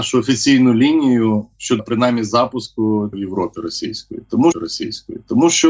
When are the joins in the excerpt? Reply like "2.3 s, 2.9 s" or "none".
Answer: 1.8 s, 3.1 s, 4.5 s